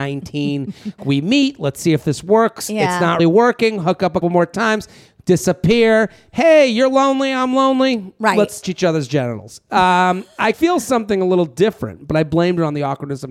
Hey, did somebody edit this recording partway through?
yes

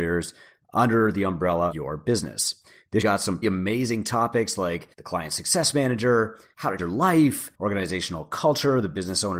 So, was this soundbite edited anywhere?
yes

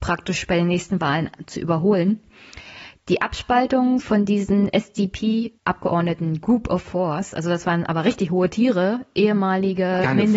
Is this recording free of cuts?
no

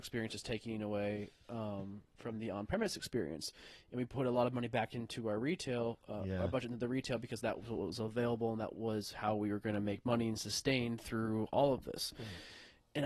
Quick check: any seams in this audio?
no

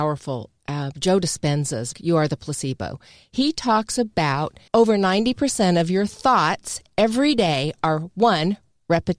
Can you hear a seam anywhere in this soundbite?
yes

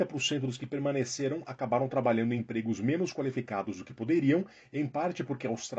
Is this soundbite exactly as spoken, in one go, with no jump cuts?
yes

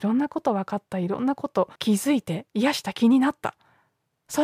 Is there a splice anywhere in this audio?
yes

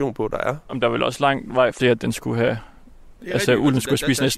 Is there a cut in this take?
yes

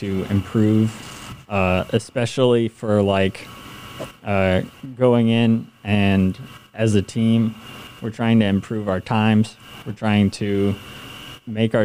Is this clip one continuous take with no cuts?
yes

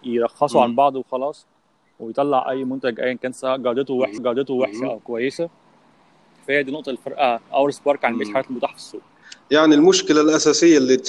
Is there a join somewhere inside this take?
yes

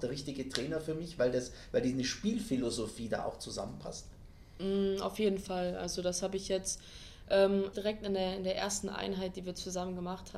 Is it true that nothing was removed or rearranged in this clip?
no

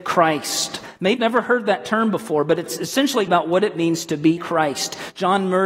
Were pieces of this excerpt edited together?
yes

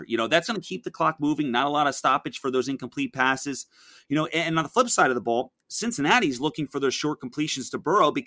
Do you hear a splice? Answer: no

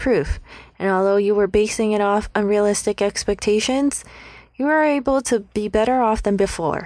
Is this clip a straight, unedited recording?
yes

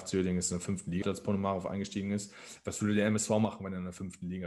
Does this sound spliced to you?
yes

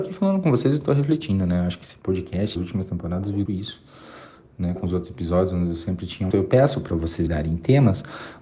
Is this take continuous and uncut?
no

